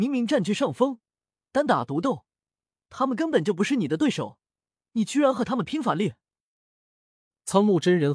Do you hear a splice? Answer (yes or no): no